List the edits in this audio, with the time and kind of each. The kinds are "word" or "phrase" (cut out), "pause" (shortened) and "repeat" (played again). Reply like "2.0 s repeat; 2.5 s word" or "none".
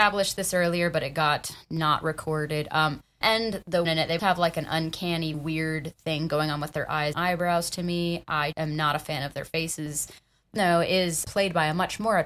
3.2 s word; 3.8 s word; 4.2 s word; 5.3 s word; 7.1 s word; 8.5 s word; 10.6 s word; 11.2 s word